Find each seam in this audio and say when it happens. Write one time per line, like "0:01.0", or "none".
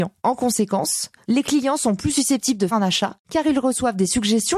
0:02.7